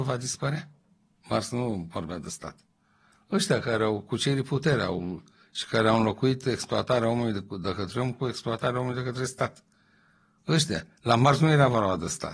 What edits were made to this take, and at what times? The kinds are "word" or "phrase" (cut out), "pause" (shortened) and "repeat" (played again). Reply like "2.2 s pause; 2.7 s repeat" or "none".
none